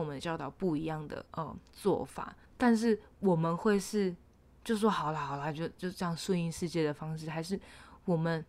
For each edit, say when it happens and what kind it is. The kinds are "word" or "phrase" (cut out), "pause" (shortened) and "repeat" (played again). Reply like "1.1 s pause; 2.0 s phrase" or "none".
1.3 s pause; 2.4 s pause; 4.2 s pause